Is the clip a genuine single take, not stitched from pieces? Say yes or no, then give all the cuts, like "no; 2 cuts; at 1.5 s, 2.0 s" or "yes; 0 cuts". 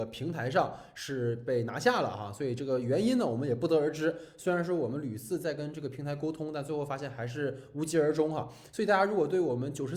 yes; 0 cuts